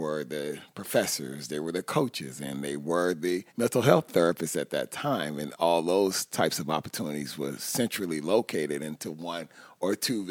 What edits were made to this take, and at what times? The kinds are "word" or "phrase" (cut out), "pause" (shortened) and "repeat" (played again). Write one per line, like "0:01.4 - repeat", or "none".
0:03.5 - pause